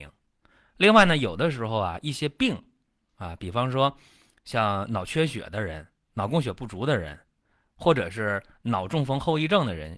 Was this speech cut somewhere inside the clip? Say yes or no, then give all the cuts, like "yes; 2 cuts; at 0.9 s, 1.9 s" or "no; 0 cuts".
no; 0 cuts